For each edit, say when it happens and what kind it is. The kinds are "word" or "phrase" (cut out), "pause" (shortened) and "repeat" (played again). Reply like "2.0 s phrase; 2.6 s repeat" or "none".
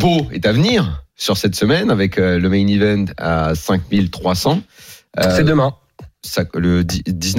1.1 s pause